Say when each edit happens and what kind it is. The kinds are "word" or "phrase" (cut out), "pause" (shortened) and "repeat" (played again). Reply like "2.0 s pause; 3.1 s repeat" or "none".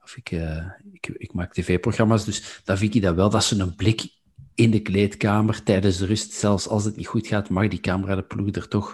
4.5 s pause